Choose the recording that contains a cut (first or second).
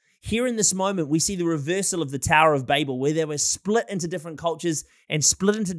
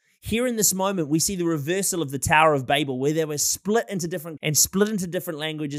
second